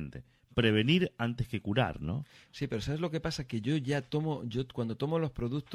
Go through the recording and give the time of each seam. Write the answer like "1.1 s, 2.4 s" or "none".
none